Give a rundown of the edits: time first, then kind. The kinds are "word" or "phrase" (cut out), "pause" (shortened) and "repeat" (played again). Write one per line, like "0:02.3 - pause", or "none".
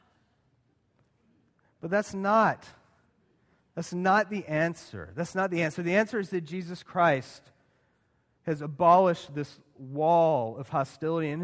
none